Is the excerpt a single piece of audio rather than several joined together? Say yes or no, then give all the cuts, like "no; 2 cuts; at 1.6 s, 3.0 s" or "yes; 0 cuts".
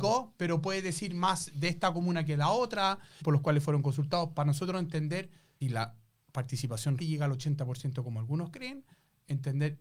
no; 3 cuts; at 3.2 s, 5.6 s, 7.0 s